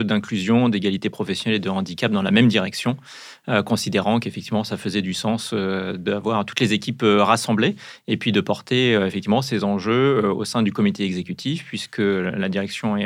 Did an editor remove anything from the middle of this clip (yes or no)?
no